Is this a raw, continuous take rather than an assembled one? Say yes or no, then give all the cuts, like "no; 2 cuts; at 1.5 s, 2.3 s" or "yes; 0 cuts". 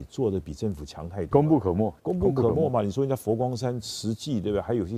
no; 1 cut; at 2.0 s